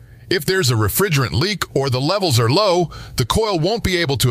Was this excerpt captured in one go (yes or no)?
yes